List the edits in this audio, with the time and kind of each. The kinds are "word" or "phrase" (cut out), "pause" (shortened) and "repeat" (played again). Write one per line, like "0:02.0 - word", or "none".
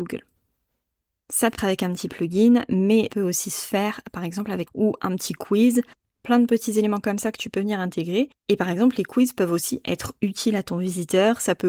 0:01.6 - word
0:03.1 - word
0:04.7 - phrase
0:05.9 - pause
0:08.3 - pause